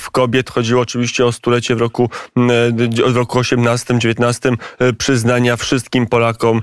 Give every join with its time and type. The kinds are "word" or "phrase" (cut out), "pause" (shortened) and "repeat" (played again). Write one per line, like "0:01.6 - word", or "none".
none